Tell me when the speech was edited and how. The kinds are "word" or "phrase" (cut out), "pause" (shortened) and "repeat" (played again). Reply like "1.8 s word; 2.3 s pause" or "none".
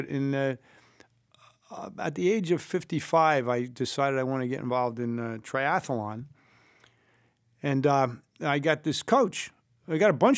none